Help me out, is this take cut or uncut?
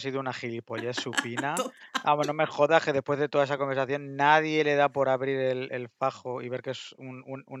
uncut